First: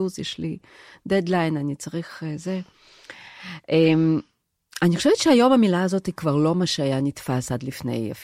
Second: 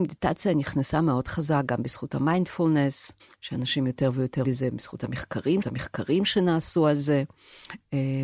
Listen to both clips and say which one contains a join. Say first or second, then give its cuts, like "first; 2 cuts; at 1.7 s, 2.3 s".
second; 3 cuts; at 3.2 s, 4.4 s, 5.6 s